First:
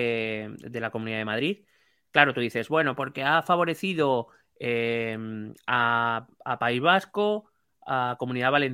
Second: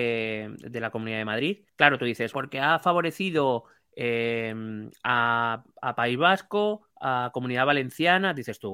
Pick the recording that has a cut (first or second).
second